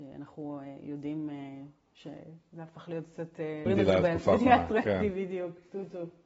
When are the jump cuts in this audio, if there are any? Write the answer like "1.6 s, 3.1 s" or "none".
3.7 s